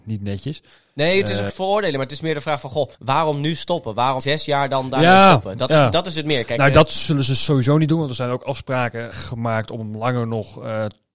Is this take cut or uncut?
cut